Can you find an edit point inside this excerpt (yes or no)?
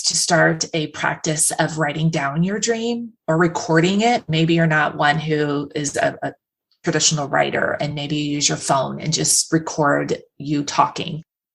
no